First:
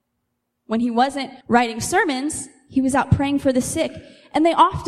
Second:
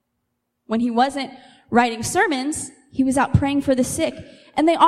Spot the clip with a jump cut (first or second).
first